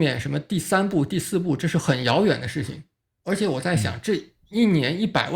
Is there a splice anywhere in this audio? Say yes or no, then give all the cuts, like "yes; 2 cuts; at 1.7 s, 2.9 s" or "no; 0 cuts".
no; 0 cuts